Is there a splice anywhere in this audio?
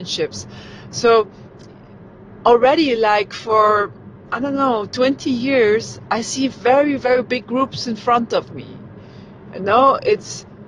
no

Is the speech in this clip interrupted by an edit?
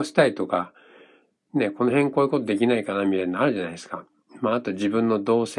no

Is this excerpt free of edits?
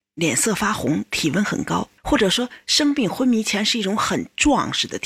no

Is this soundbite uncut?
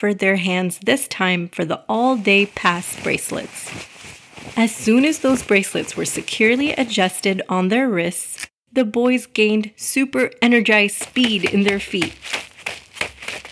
yes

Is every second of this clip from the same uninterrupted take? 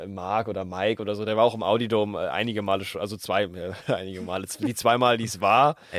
yes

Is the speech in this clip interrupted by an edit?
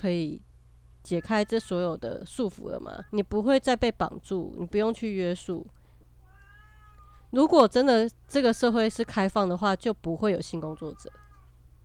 yes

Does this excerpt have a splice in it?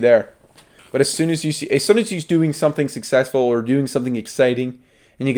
no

